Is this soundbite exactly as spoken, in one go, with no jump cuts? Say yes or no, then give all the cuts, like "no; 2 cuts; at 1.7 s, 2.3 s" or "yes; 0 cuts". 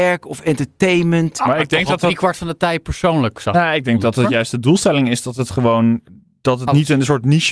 yes; 0 cuts